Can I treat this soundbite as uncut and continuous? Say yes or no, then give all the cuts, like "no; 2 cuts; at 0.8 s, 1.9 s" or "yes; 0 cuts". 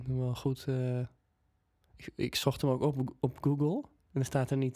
yes; 0 cuts